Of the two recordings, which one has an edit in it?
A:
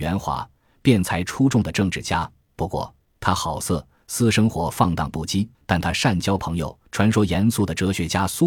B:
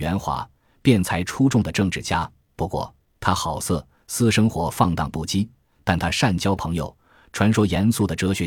A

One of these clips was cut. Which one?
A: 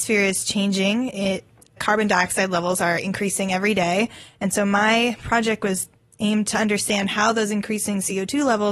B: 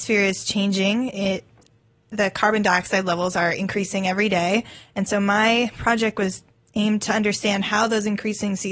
A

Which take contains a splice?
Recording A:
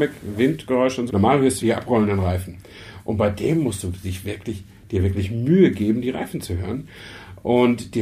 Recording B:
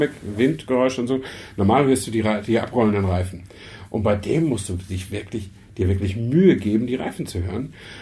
A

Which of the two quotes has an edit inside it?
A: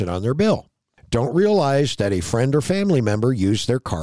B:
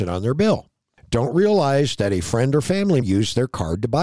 B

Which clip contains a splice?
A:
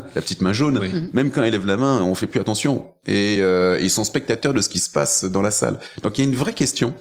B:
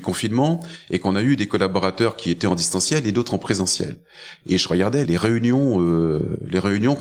B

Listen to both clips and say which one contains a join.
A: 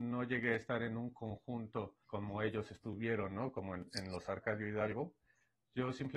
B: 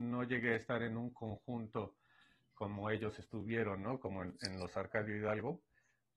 A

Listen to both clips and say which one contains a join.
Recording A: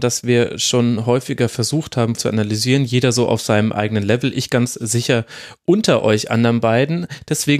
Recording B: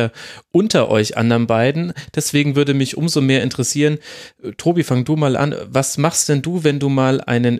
A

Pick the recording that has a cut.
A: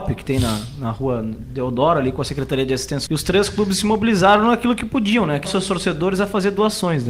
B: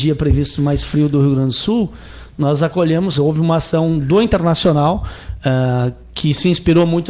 A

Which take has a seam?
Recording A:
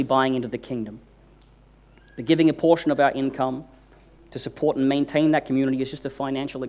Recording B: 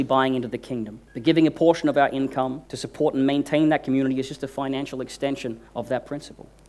B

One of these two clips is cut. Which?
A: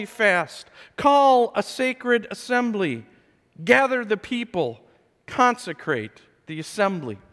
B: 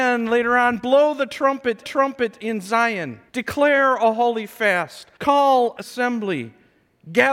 B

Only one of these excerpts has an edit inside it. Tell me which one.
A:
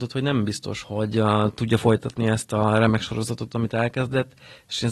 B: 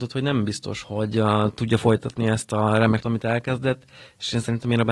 B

